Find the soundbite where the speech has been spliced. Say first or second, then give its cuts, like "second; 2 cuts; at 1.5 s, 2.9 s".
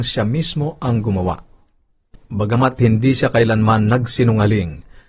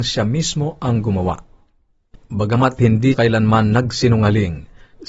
second; 1 cut; at 3.1 s